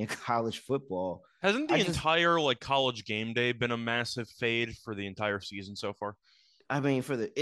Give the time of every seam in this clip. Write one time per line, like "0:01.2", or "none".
none